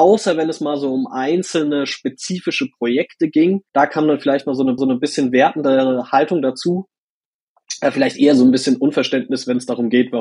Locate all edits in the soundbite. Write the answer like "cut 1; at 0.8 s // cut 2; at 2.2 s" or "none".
cut 1; at 3.7 s // cut 2; at 4.8 s